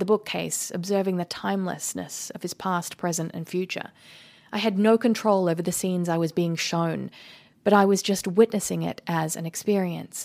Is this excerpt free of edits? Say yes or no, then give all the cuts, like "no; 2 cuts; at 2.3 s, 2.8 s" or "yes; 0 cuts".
yes; 0 cuts